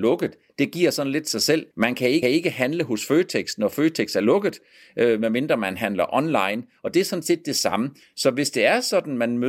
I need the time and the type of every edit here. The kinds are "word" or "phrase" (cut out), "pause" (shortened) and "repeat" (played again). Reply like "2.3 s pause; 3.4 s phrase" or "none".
1.7 s pause; 2.2 s repeat

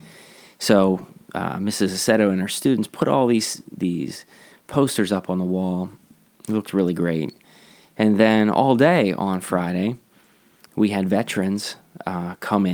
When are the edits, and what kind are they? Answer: none

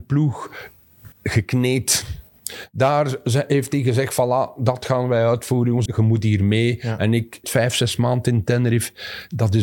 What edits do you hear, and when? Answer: 1.1 s pause; 5.9 s word; 7.4 s word

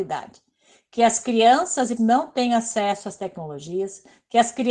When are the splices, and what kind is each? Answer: 2.0 s word

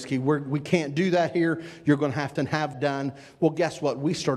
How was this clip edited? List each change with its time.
2.4 s phrase; 2.7 s word

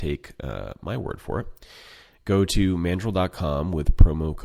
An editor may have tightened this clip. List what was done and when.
none

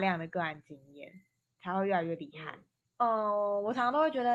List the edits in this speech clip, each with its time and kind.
1.5 s word

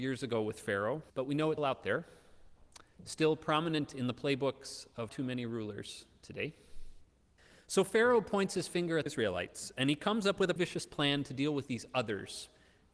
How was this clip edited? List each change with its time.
1.1 s pause; 1.6 s word; 5.1 s word; 7.4 s pause; 9.1 s word; 10.6 s word

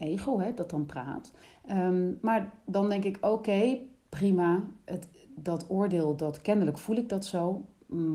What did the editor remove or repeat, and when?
1.4 s pause

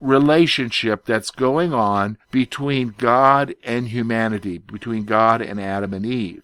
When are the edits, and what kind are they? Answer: 2.2 s pause

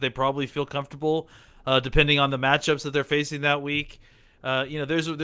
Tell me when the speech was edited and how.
none

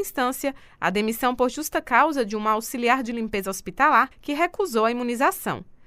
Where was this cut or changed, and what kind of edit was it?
4.1 s pause

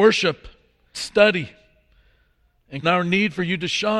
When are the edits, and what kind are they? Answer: 0.9 s word; 2.8 s word

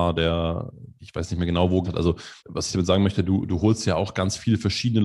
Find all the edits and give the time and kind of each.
1.0 s word; 1.8 s word; 2.4 s pause

